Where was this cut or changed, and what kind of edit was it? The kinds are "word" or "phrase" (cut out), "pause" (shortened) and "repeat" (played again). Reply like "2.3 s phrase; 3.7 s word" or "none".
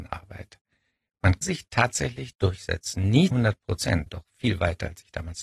1.4 s word; 3.3 s word; 4.1 s word